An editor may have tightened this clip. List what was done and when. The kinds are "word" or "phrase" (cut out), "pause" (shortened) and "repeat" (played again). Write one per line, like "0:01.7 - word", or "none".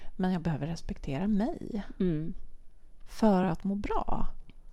none